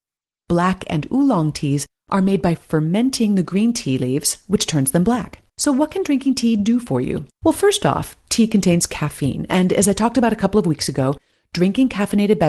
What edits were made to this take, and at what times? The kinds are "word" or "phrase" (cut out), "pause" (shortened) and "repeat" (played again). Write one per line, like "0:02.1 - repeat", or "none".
0:05.5 - pause
0:07.4 - pause